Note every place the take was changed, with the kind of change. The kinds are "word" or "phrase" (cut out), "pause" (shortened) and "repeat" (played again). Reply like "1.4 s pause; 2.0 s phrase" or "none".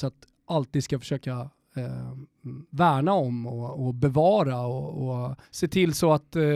5.5 s pause